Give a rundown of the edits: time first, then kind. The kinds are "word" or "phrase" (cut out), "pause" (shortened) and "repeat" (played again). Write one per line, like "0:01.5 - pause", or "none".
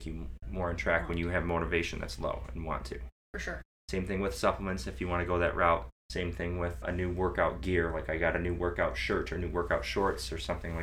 0:06.0 - pause
0:06.8 - word